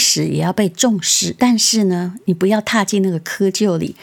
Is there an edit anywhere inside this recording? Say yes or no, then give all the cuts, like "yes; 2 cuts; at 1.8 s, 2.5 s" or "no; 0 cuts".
yes; 1 cut; at 1.4 s